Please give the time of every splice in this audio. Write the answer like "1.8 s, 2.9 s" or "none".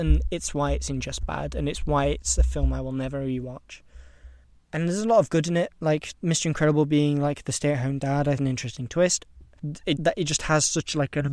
4.4 s, 8.4 s, 10.0 s